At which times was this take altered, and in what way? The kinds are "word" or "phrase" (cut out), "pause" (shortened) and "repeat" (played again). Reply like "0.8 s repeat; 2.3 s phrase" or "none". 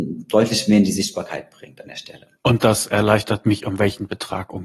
2.4 s pause